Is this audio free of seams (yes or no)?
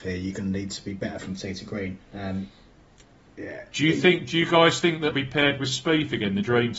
no